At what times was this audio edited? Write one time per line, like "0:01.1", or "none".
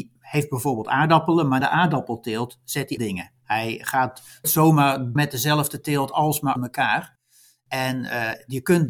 0:01.6
0:03.0
0:04.4
0:05.2
0:06.6